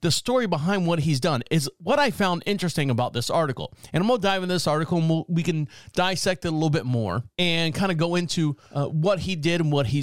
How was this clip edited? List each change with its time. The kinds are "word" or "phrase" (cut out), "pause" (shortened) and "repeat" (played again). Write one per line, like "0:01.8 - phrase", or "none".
none